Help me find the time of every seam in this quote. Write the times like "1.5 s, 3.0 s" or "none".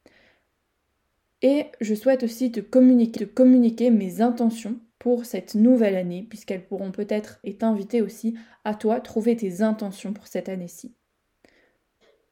3.2 s, 4.9 s, 7.4 s